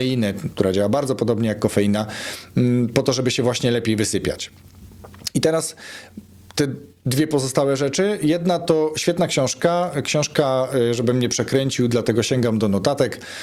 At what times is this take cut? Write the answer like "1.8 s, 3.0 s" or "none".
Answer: none